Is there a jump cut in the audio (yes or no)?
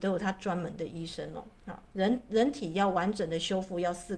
yes